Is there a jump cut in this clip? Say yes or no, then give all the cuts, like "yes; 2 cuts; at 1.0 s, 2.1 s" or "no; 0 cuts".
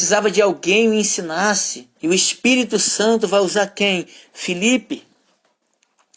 yes; 1 cut; at 2.0 s